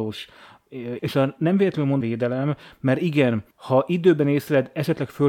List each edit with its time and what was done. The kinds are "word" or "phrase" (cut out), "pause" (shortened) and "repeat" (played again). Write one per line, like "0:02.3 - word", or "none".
0:01.0 - phrase
0:02.0 - phrase
0:03.5 - pause